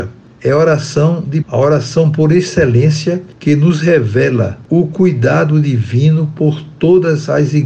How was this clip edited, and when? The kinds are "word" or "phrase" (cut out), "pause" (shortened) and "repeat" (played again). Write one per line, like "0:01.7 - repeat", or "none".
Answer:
0:01.4 - word
0:04.7 - word